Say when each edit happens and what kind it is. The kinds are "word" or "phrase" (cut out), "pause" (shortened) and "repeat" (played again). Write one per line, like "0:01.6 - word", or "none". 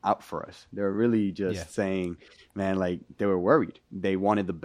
none